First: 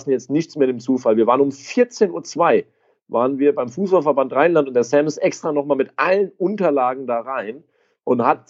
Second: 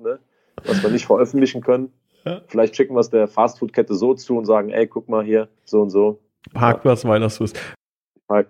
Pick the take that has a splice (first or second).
second